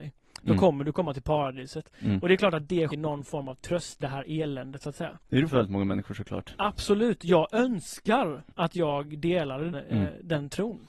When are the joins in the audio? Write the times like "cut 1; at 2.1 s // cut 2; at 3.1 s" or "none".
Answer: cut 1; at 2.9 s // cut 2; at 4.0 s // cut 3; at 5.5 s // cut 4; at 8.5 s // cut 5; at 9.7 s